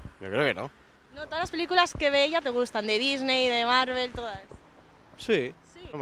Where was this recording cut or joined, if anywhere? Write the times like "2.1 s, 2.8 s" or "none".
none